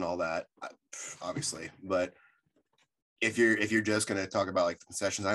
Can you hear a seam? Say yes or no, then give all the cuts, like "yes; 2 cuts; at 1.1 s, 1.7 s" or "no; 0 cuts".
no; 0 cuts